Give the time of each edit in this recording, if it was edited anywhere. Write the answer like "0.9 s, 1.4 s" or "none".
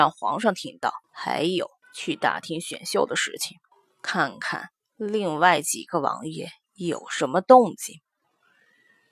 1.0 s, 1.8 s, 3.7 s